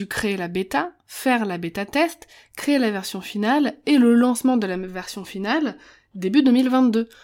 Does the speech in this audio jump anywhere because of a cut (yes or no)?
no